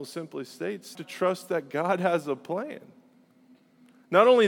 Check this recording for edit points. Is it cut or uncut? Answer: cut